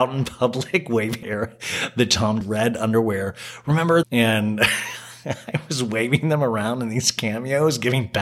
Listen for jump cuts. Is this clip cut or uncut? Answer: cut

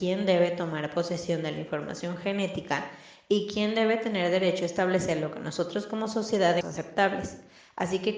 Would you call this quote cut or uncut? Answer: cut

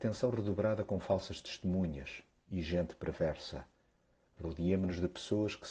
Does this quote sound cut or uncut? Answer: uncut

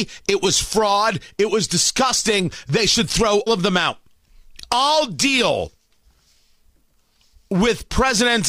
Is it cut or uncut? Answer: cut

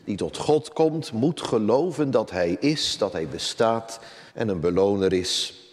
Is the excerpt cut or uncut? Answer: cut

